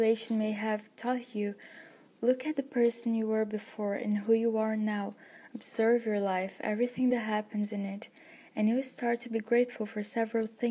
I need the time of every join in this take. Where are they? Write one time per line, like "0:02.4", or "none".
none